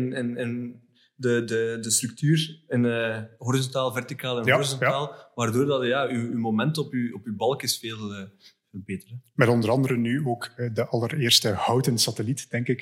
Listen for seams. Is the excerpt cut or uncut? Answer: uncut